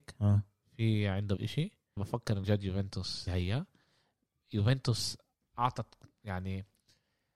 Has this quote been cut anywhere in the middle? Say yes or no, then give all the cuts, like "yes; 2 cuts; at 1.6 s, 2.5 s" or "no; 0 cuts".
yes; 5 cuts; at 1.4 s, 2.0 s, 2.4 s, 3.3 s, 5.4 s